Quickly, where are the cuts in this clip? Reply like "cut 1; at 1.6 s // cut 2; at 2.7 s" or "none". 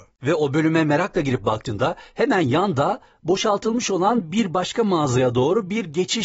none